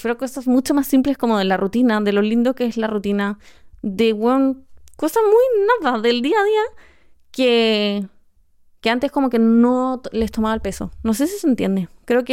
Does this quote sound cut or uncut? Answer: uncut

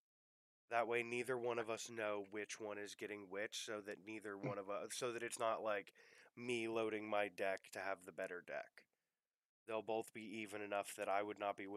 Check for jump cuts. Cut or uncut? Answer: uncut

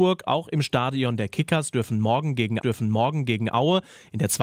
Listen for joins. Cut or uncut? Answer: cut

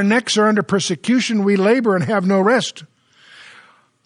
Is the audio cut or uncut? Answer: uncut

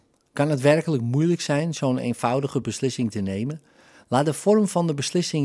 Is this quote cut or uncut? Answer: uncut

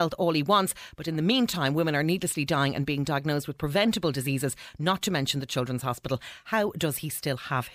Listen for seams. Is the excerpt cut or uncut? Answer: uncut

